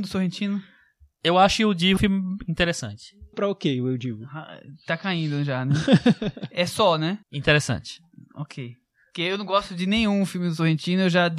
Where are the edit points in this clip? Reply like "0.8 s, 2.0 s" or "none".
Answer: 2.0 s, 3.3 s, 7.2 s